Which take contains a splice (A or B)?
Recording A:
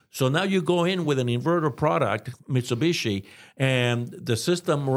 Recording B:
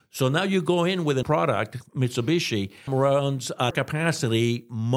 B